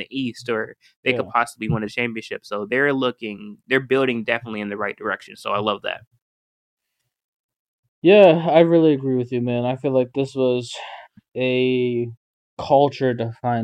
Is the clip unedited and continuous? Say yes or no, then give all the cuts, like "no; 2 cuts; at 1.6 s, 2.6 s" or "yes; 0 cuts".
yes; 0 cuts